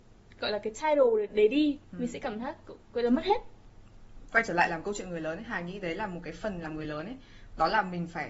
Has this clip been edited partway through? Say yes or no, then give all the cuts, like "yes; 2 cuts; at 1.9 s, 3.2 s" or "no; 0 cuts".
no; 0 cuts